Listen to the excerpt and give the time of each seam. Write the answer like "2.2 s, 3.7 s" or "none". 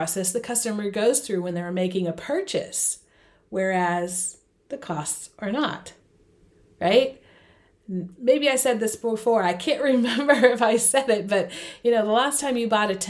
none